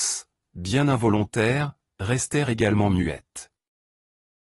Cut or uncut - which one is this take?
uncut